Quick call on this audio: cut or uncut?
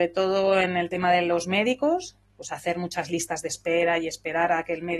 uncut